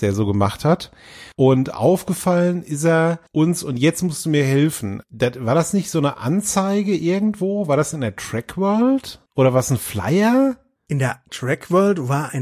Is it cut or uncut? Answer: cut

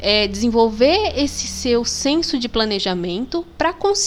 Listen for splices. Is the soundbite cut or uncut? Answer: uncut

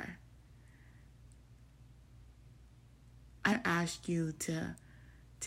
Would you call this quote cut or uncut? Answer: cut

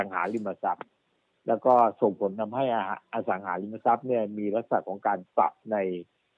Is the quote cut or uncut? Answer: uncut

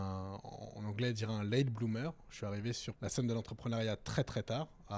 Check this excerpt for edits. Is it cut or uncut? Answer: cut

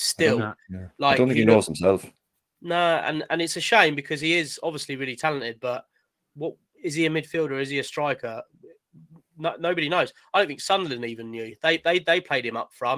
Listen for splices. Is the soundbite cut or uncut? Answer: uncut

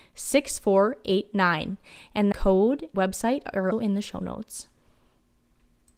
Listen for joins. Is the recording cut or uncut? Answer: cut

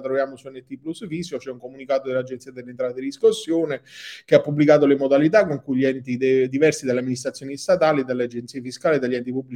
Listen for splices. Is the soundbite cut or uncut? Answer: uncut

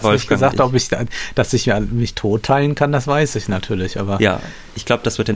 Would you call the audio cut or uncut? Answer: uncut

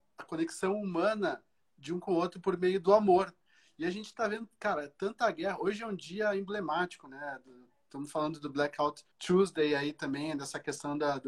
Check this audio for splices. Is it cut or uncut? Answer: cut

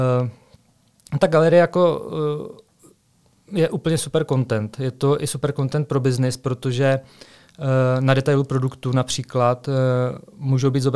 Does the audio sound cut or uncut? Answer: uncut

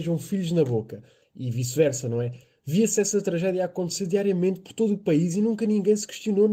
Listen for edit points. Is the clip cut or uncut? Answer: uncut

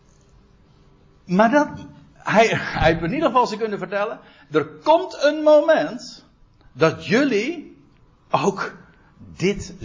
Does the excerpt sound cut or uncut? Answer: uncut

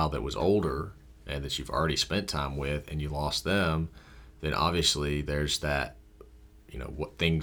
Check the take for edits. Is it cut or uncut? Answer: uncut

